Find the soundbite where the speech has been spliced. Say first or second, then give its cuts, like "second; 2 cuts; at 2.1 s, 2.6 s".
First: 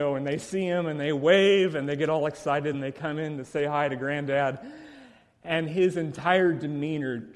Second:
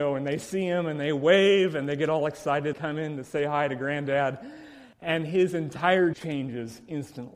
second; 3 cuts; at 2.7 s, 4.9 s, 6.1 s